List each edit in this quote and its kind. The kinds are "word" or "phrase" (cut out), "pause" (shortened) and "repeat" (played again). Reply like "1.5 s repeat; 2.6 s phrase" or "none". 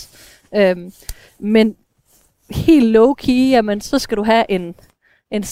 none